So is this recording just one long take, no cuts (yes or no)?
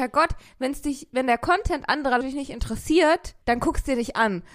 no